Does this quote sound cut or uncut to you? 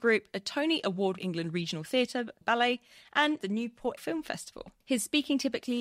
cut